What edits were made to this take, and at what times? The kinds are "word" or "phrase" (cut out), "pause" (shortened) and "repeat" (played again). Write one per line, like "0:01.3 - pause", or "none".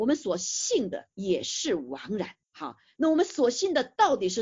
0:01.1 - pause
0:02.4 - pause